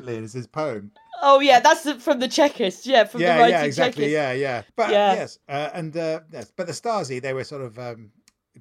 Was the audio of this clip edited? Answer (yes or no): yes